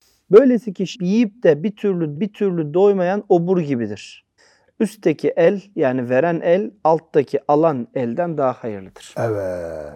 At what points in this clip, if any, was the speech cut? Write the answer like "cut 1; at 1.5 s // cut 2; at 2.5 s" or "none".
cut 1; at 0.9 s // cut 2; at 2.2 s // cut 3; at 4.4 s